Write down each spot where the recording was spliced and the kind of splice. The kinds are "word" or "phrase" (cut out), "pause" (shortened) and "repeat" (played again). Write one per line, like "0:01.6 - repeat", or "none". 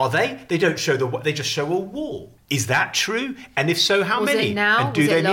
0:02.4 - pause